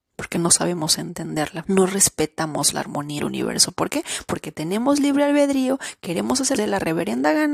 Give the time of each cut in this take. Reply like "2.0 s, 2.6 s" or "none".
1.6 s, 3.2 s, 6.6 s